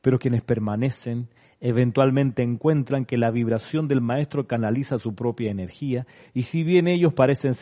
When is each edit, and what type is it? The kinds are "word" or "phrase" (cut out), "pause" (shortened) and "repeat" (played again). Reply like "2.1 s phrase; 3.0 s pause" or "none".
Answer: none